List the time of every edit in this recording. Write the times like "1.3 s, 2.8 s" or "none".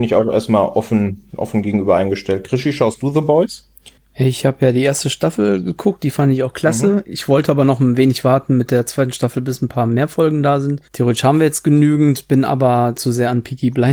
4.0 s, 10.9 s